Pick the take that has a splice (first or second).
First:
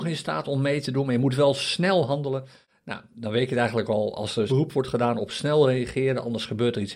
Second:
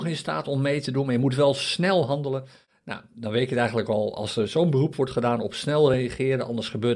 first